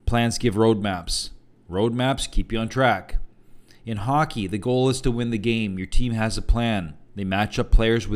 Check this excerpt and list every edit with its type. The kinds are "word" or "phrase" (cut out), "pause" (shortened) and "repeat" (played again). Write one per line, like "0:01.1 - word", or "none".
none